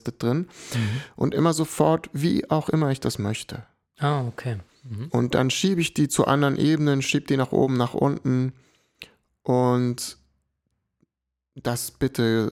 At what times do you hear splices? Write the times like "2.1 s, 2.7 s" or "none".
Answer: none